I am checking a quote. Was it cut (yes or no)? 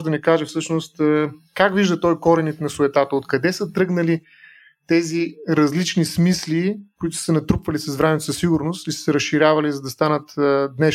no